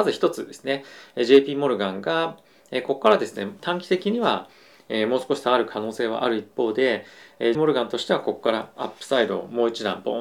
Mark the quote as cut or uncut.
cut